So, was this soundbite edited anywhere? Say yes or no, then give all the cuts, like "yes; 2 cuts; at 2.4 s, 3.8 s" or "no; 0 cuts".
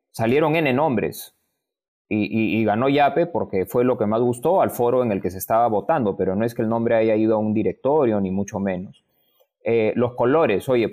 no; 0 cuts